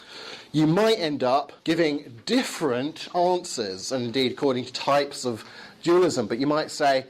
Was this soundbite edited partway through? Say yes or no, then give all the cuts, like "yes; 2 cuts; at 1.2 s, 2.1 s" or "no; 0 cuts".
yes; 2 cuts; at 1.6 s, 4.7 s